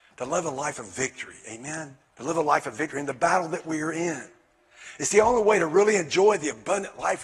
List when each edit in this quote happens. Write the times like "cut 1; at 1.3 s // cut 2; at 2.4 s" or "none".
cut 1; at 2.0 s